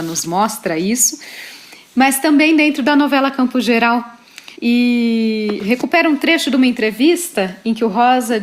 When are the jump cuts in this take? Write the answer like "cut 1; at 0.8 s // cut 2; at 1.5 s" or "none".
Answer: cut 1; at 4.5 s